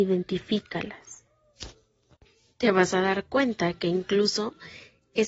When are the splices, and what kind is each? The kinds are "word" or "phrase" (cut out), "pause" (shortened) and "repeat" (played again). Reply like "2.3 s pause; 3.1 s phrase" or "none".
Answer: 2.3 s pause